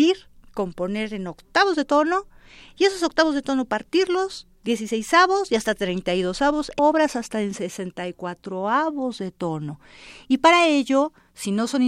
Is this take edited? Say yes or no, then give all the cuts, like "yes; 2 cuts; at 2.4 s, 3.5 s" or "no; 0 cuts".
yes; 1 cut; at 6.8 s